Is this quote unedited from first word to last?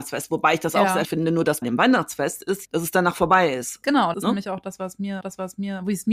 no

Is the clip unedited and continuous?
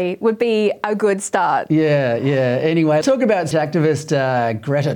no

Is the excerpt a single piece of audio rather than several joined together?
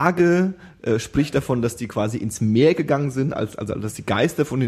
yes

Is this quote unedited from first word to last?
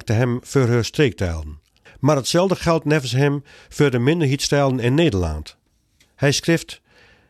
no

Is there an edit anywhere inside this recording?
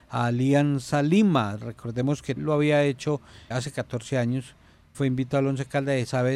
yes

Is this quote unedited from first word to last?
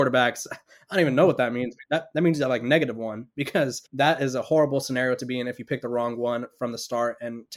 no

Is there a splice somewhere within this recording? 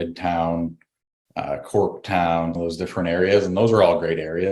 yes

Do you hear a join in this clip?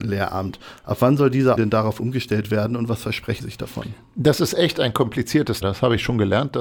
yes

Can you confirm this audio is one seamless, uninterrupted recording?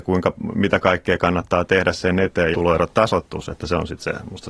no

